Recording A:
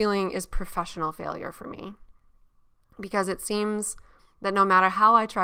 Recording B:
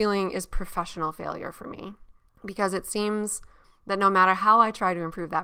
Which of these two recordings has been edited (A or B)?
B